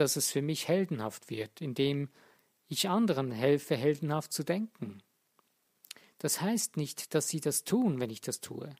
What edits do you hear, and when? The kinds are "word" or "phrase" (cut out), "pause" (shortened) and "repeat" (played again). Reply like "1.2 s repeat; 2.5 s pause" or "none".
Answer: none